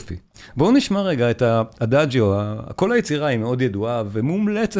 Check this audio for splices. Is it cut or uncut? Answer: uncut